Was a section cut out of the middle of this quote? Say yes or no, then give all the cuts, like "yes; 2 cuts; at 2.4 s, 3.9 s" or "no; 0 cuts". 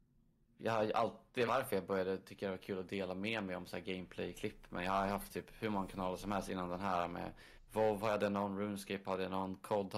yes; 1 cut; at 1.5 s